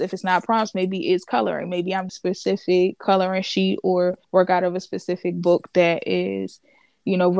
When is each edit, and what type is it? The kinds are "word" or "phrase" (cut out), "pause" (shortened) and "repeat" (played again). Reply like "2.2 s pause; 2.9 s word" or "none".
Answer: 2.1 s phrase; 4.2 s pause